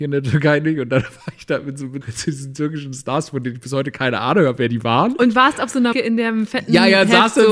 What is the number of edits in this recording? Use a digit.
2